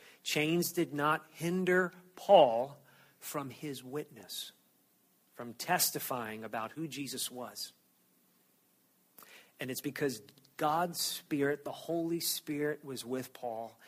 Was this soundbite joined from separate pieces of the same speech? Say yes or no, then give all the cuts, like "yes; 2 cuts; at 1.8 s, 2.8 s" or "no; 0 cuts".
no; 0 cuts